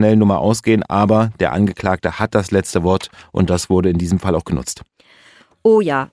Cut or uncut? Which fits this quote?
uncut